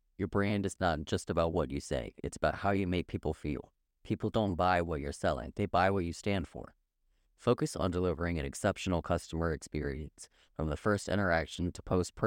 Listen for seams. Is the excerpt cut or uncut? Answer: uncut